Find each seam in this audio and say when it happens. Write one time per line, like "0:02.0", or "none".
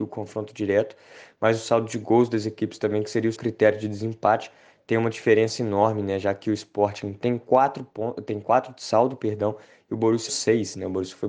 0:03.3
0:10.3